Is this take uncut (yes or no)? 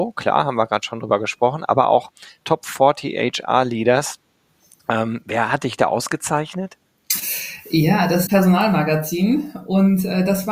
no